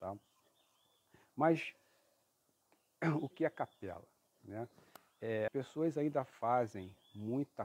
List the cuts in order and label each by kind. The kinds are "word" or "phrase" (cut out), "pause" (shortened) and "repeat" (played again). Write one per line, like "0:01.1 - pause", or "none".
0:03.3 - word
0:05.5 - word

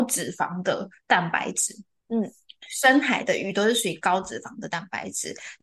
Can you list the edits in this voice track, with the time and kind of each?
none

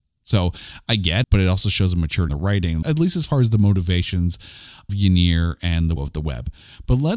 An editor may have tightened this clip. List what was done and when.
0:01.2 - word
0:02.3 - word
0:02.8 - word
0:04.9 - word
0:06.0 - word

